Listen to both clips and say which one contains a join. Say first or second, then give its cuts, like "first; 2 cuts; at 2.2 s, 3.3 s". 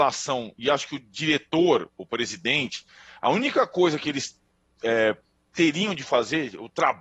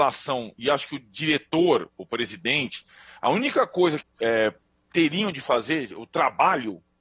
second; 1 cut; at 4.0 s